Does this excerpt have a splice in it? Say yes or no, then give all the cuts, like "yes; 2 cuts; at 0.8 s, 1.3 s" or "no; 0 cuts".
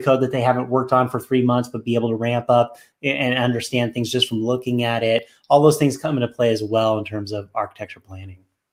no; 0 cuts